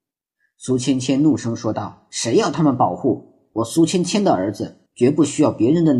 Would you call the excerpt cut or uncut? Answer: cut